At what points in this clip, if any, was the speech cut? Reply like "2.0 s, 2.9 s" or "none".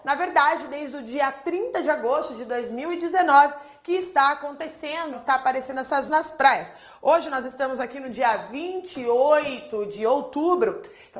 5.1 s, 6.1 s